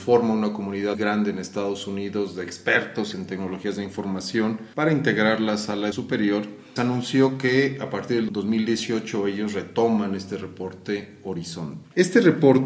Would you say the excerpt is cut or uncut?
cut